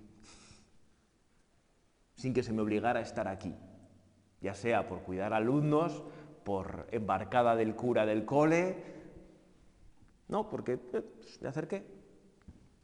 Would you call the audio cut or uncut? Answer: uncut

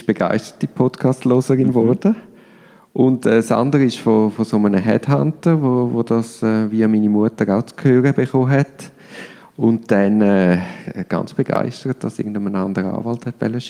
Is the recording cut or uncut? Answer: uncut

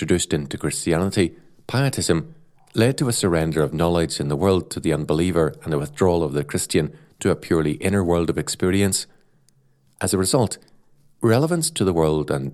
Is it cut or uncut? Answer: uncut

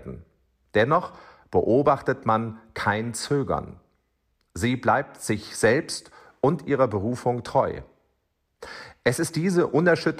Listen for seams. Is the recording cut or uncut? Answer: uncut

